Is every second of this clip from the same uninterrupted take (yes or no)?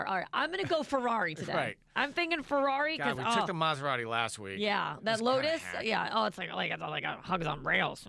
yes